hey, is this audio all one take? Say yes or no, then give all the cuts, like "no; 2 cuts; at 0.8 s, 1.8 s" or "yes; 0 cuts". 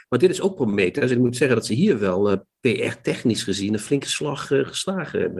yes; 0 cuts